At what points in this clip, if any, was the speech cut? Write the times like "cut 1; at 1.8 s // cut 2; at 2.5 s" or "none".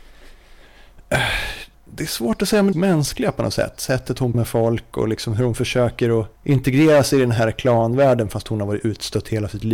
cut 1; at 1.7 s // cut 2; at 2.7 s // cut 3; at 4.3 s // cut 4; at 6.4 s